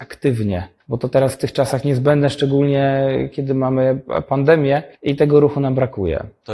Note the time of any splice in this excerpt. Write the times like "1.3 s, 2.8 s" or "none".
4.9 s